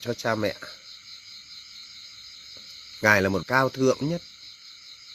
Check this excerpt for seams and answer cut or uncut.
cut